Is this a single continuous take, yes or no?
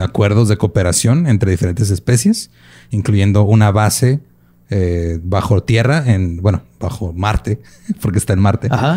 yes